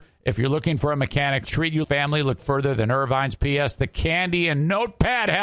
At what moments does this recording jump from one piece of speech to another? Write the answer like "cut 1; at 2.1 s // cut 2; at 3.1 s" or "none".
cut 1; at 1.4 s // cut 2; at 1.8 s // cut 3; at 2.4 s